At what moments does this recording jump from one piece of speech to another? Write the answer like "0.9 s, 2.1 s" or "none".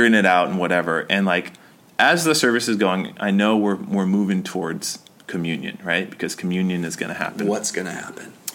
none